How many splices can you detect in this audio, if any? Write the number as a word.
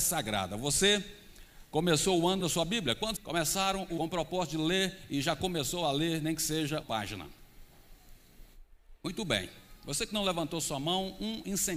four